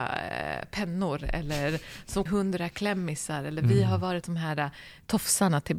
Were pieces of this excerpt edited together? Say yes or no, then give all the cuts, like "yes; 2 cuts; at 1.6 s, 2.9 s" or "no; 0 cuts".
yes; 2 cuts; at 2.3 s, 4.2 s